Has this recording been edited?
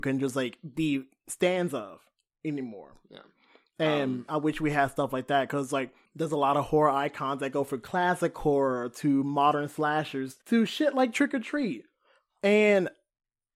yes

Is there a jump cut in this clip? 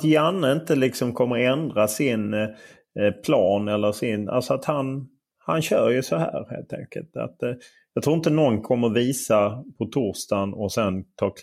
no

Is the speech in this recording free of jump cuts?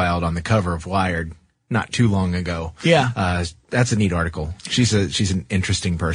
yes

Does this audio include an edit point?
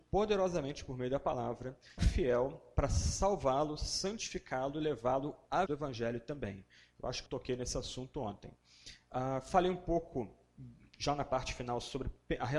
yes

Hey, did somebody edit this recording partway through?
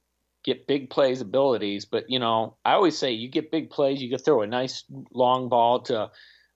yes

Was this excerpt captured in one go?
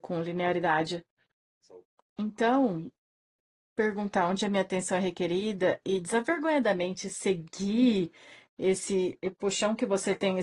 yes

